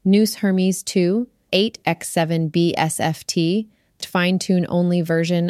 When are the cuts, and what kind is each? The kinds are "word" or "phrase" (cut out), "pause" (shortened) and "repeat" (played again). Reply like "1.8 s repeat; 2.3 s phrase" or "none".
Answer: 1.5 s word; 4.0 s word